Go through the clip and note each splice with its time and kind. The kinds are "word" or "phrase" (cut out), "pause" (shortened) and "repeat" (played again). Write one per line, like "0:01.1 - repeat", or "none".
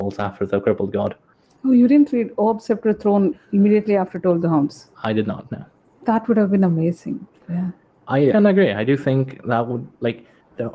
0:04.9 - pause
0:08.3 - word